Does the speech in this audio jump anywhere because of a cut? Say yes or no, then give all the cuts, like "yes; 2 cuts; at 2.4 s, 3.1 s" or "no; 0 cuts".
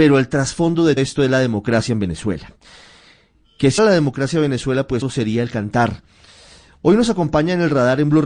yes; 3 cuts; at 1.0 s, 3.8 s, 5.0 s